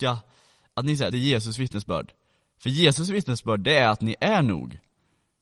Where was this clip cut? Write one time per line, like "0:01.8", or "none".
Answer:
0:01.1